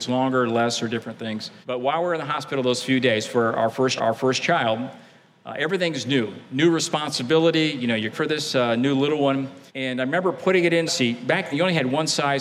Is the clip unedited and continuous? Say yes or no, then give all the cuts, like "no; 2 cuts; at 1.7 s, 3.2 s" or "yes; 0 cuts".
no; 6 cuts; at 1.6 s, 4.0 s, 8.1 s, 9.7 s, 10.9 s, 11.5 s